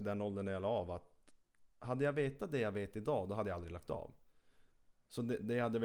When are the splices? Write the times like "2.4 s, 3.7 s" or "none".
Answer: none